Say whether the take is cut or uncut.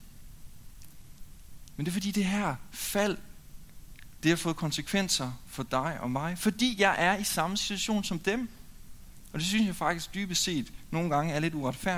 uncut